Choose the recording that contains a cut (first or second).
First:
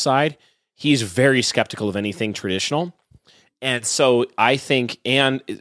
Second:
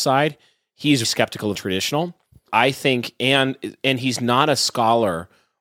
second